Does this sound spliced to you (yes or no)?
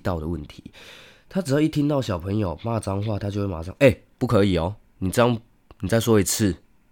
yes